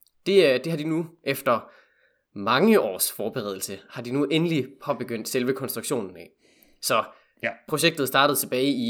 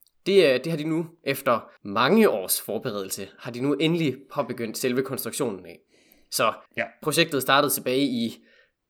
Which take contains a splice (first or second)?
second